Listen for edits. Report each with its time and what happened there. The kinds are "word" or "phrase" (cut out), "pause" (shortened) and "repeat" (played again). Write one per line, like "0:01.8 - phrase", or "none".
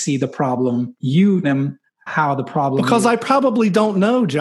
0:01.0 - word
0:01.4 - word
0:02.1 - word